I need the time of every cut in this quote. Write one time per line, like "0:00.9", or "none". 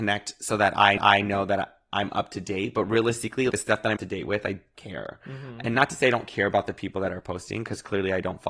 0:01.0
0:03.5
0:04.0
0:04.7